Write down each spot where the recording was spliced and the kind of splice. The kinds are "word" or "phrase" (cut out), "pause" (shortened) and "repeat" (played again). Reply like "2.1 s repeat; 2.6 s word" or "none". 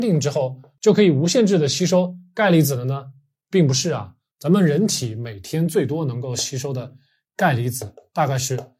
none